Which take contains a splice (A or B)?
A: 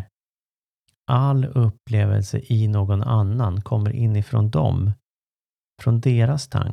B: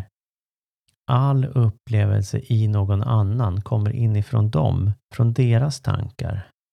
B